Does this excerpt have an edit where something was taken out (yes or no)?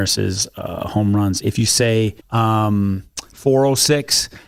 yes